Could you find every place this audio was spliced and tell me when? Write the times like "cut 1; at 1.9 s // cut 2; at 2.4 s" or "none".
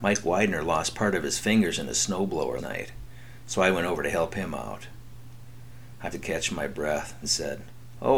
cut 1; at 2.6 s // cut 2; at 6.1 s // cut 3; at 7.2 s